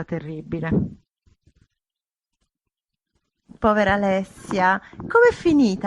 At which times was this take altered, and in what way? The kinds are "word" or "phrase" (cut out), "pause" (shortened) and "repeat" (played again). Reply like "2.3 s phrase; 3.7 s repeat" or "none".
none